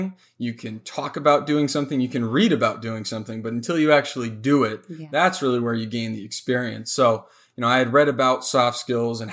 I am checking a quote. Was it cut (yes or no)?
no